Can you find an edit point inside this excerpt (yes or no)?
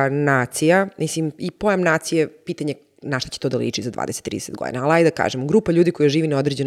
no